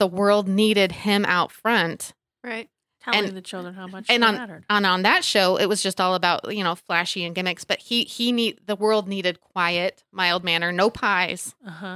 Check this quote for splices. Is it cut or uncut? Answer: uncut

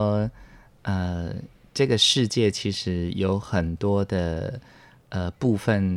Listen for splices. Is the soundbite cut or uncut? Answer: uncut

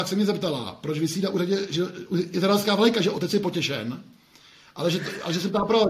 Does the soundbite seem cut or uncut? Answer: uncut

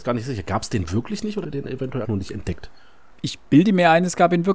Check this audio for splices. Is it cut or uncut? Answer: cut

